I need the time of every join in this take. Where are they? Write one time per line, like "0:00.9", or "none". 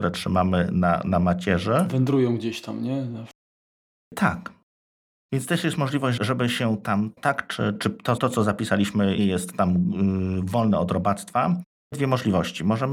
0:06.2
0:07.2
0:07.7
0:08.2
0:09.2
0:11.9